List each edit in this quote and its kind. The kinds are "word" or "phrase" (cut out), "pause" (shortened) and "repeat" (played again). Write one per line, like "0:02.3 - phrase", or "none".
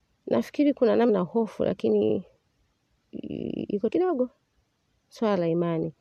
0:01.1 - word
0:03.9 - word